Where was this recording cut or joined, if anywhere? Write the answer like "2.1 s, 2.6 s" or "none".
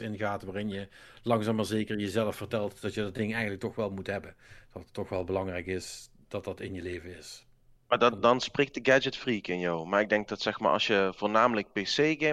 none